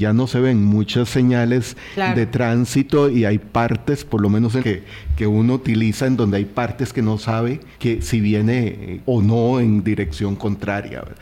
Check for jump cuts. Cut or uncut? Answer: cut